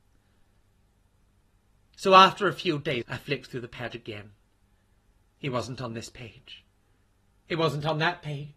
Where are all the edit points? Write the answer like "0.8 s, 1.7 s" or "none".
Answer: 3.0 s